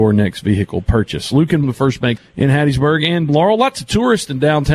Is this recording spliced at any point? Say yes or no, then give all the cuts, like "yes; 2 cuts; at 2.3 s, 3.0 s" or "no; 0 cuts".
yes; 3 cuts; at 1.6 s, 2.2 s, 3.3 s